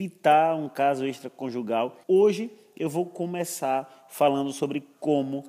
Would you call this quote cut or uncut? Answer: cut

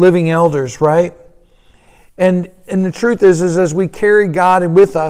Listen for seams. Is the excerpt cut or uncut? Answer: uncut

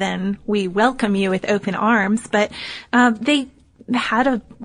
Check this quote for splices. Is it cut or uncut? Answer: uncut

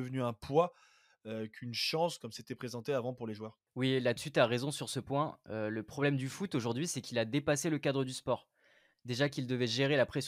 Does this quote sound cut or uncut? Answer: uncut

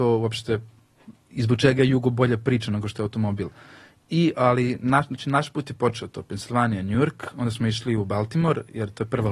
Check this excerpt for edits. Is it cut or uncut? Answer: uncut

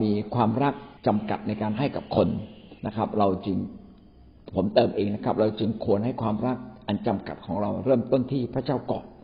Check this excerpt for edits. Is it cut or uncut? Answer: cut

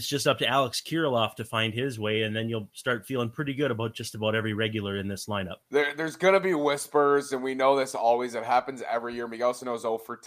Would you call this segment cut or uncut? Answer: cut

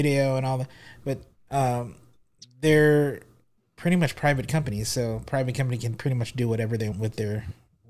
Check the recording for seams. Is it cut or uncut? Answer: cut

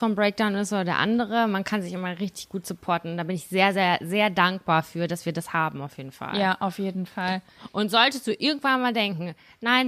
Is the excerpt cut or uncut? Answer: uncut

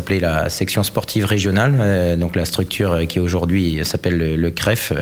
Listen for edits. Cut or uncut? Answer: uncut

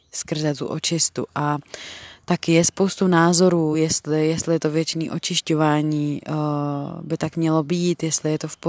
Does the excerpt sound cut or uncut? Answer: uncut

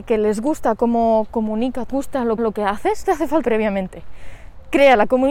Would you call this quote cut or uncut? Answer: cut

